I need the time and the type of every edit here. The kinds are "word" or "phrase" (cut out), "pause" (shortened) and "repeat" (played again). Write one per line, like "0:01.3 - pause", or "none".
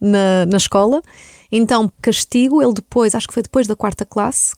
0:02.0 - word